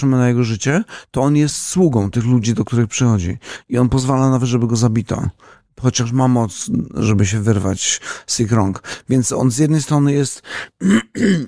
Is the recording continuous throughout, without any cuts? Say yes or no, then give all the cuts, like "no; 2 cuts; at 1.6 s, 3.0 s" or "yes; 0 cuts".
yes; 0 cuts